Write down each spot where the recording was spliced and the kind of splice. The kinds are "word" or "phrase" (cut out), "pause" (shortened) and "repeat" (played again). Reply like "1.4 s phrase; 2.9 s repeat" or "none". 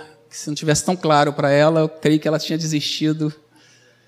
none